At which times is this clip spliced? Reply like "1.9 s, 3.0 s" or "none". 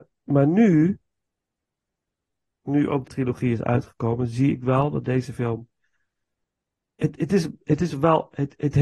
3.1 s